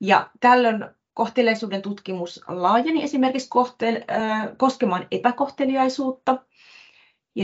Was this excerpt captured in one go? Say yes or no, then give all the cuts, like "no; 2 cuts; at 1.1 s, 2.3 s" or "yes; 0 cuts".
yes; 0 cuts